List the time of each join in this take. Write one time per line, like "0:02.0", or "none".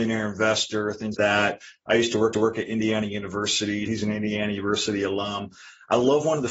0:01.1
0:02.3
0:03.8